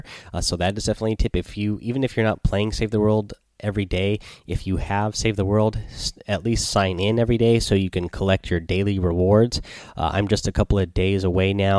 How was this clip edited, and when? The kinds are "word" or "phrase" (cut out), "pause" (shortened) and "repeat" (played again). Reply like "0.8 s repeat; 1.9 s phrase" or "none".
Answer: none